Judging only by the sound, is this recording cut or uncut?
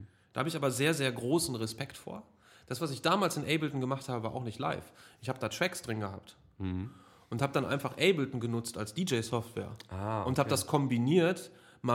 uncut